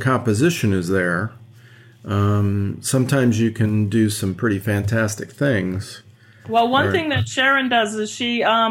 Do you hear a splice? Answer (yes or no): no